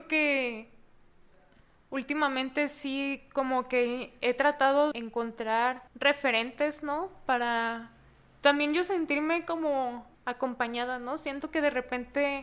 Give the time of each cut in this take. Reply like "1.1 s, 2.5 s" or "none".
4.9 s, 5.9 s, 10.1 s

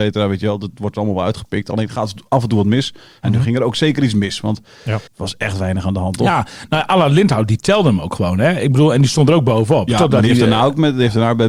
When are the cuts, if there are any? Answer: 5.1 s

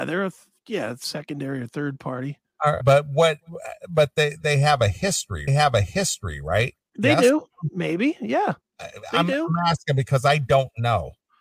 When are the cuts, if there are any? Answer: 2.8 s, 5.5 s, 8.6 s

